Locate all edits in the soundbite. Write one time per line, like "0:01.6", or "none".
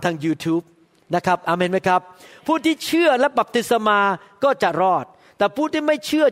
none